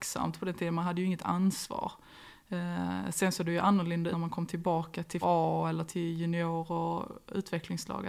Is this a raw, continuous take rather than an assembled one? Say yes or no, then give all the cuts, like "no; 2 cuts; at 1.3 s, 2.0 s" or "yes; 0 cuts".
no; 3 cuts; at 4.1 s, 5.2 s, 5.9 s